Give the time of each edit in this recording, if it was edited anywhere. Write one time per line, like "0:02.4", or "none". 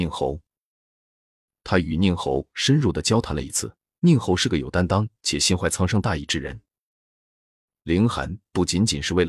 0:03.8